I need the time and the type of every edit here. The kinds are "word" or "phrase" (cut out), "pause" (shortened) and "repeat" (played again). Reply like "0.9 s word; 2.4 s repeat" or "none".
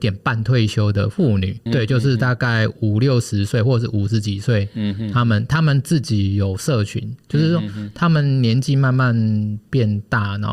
1.7 s word; 7.2 s pause